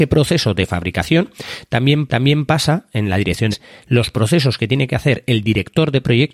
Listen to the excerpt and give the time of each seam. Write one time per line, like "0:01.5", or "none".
0:02.1
0:03.5